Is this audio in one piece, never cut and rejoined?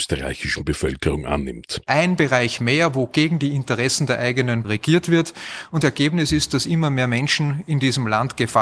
no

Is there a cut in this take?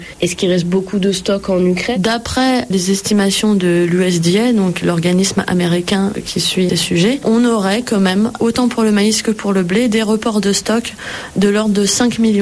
yes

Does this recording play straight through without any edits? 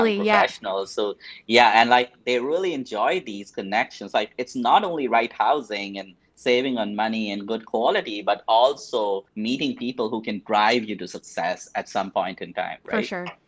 no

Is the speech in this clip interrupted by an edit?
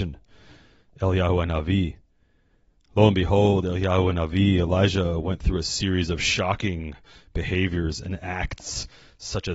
no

